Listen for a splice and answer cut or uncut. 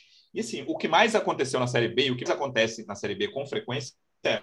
cut